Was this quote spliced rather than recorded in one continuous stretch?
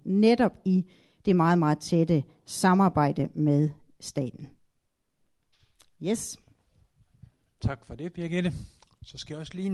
no; 0 cuts

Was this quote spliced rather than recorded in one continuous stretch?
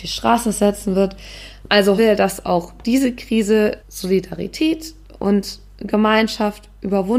yes; 2 cuts; at 2.0 s, 3.8 s

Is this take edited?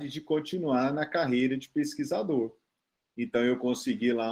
no; 0 cuts

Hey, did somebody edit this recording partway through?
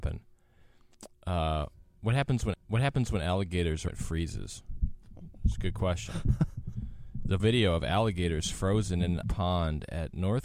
yes; 4 cuts; at 2.5 s, 3.9 s, 7.4 s, 9.2 s

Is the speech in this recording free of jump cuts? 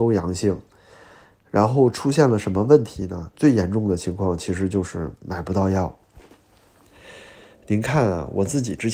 yes; 0 cuts

